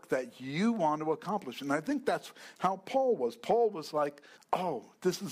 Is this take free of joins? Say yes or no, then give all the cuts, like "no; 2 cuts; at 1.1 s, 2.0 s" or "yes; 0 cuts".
no; 1 cut; at 4.4 s